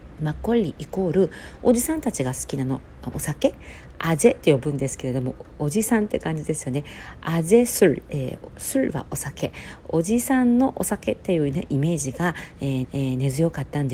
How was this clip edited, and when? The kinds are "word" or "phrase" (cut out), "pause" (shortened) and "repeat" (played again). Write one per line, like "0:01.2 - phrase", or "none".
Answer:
0:12.8 - repeat